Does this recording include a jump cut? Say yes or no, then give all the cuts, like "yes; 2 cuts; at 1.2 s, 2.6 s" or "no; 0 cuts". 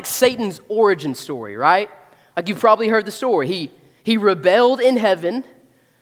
no; 0 cuts